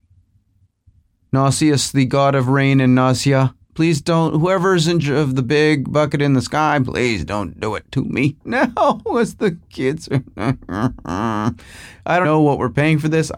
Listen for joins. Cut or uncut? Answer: cut